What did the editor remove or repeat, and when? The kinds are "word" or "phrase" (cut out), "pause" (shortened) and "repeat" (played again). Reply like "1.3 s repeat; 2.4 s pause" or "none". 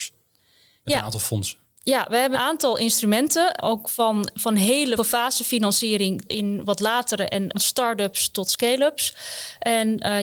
2.3 s word; 3.6 s word; 5.0 s word; 6.3 s word; 6.6 s word; 7.5 s word